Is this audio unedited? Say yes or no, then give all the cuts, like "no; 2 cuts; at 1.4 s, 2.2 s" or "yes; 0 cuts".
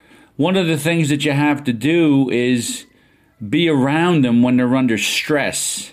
yes; 0 cuts